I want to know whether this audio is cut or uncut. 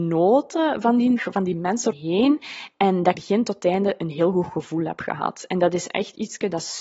cut